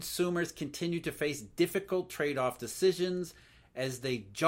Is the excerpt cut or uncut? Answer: uncut